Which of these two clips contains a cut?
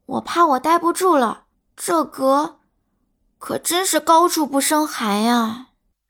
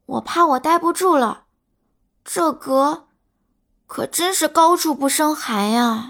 first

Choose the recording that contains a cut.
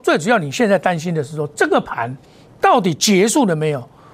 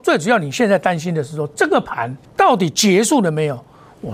second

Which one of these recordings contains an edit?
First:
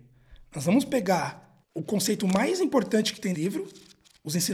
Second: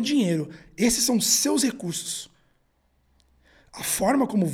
first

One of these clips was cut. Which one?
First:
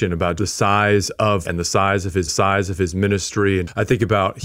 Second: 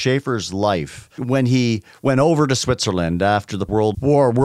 first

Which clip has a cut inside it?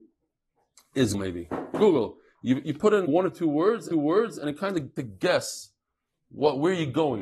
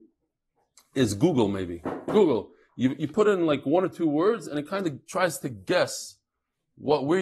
first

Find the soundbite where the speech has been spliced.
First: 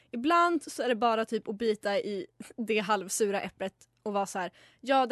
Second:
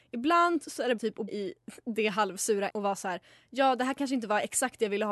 second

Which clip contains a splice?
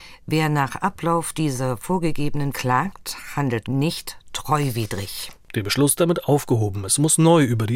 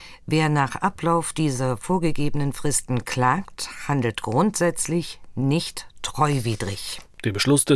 first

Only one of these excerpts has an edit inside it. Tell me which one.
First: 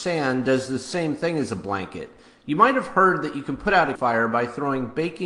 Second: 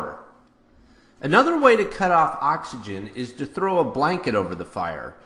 first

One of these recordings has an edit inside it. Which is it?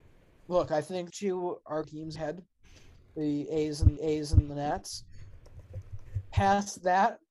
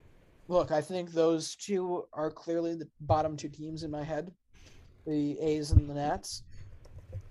first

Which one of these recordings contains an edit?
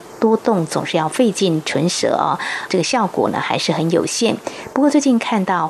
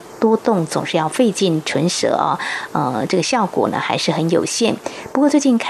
first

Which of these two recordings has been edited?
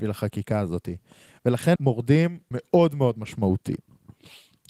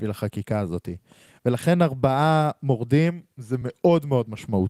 first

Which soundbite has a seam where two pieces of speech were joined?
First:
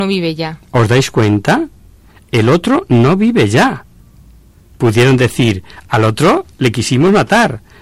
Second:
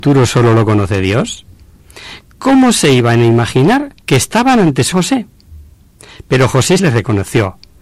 second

